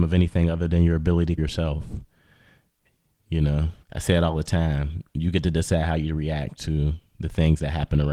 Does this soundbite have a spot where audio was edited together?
yes; 2 cuts; at 1.4 s, 3.8 s

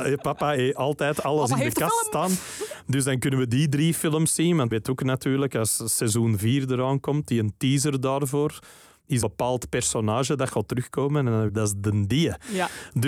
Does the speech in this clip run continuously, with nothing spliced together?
no; 3 cuts; at 4.7 s, 9.2 s, 11.5 s

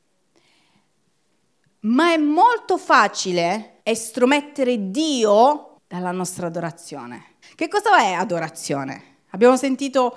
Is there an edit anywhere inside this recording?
yes; 3 cuts; at 3.8 s, 5.8 s, 7.4 s

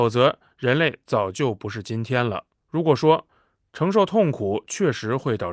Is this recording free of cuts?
no; 1 cut; at 2.6 s

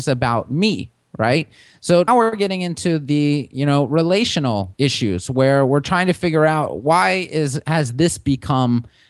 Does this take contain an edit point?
yes; 1 cut; at 2.1 s

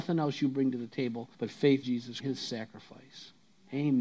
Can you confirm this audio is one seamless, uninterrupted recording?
no; 3 cuts; at 1.3 s, 1.8 s, 2.2 s

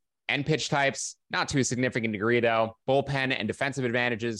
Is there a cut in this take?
yes; 2 cuts; at 1.2 s, 2.8 s

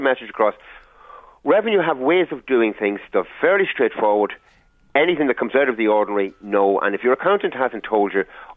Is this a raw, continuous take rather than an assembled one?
yes; 0 cuts

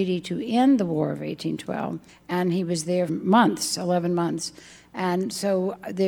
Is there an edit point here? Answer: yes; 2 cuts; at 2.1 s, 3.1 s

